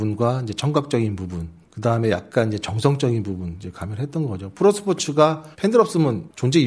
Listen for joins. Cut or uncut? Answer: cut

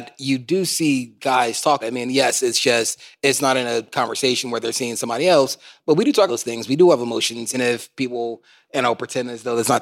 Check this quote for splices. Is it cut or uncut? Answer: cut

